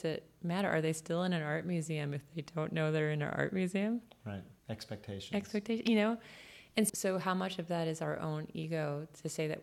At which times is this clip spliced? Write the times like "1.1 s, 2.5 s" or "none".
4.6 s, 6.9 s